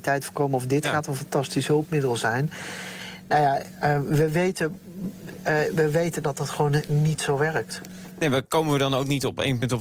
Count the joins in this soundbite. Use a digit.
0